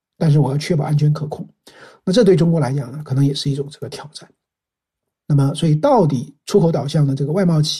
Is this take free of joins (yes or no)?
yes